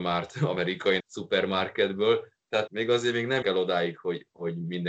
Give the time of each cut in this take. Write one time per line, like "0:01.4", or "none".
0:01.0
0:02.7
0:03.4